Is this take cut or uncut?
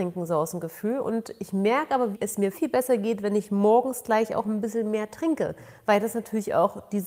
cut